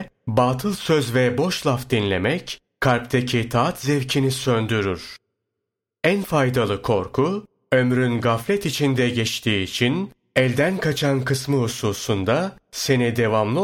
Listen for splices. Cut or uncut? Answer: uncut